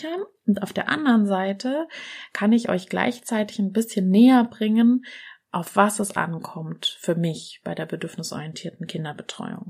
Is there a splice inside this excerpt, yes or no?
no